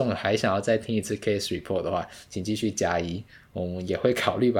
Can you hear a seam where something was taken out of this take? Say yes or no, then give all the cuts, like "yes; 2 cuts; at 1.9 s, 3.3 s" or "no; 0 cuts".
no; 0 cuts